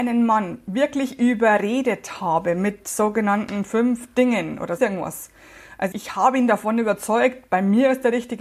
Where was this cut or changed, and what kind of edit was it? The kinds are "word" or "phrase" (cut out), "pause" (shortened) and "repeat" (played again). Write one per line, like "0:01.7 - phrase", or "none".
0:04.8 - word
0:05.9 - word